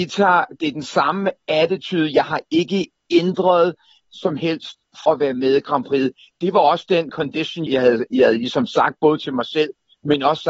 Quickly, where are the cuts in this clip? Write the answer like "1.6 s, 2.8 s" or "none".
4.0 s, 5.0 s, 7.1 s, 7.7 s